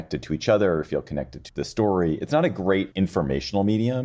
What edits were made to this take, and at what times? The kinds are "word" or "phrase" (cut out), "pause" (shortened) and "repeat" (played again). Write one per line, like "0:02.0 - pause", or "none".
0:01.5 - word
0:02.9 - word